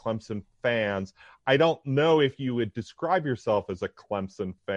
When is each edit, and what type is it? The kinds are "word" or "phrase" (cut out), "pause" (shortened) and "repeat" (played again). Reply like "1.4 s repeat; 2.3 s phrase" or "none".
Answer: none